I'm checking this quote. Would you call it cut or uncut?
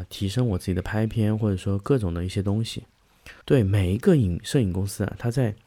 cut